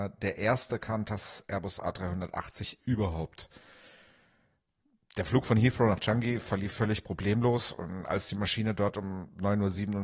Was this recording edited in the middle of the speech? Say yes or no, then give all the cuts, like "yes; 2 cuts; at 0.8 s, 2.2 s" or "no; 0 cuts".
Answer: no; 0 cuts